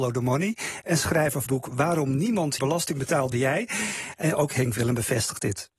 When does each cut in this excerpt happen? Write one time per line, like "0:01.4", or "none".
0:01.5
0:02.6
0:03.3

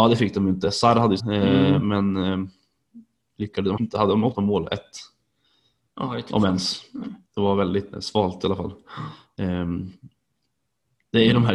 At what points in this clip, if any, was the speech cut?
0:01.2
0:03.8
0:04.3
0:07.2
0:07.9

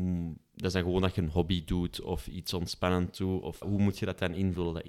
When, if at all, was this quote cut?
0:03.6

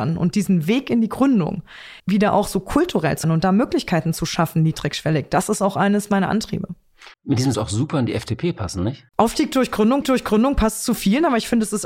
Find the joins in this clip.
0:02.0
0:03.2
0:07.1
0:07.5
0:09.1
0:10.0

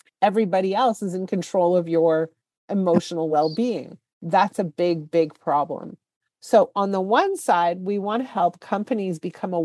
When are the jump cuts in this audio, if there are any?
none

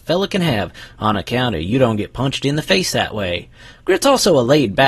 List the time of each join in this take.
none

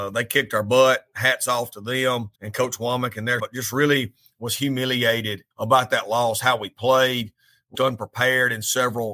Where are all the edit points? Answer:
0:02.4
0:03.4
0:05.5
0:07.7

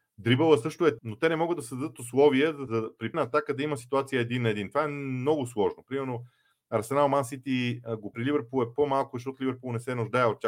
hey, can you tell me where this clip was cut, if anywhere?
0:01.0
0:02.7
0:03.1
0:08.1

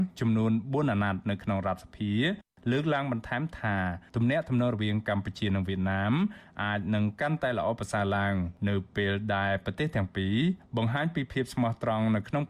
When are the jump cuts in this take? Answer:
none

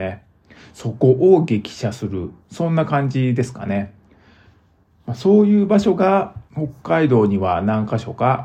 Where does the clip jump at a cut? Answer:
0:02.4

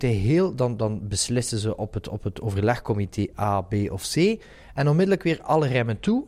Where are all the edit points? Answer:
none

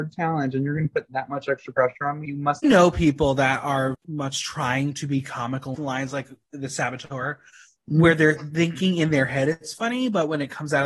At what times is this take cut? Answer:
0:02.3
0:02.6
0:03.9
0:05.7

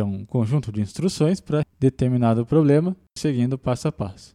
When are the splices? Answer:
0:01.6
0:03.2

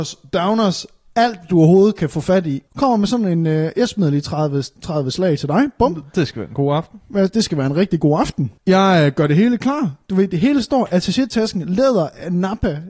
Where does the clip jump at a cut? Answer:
0:02.7
0:08.6

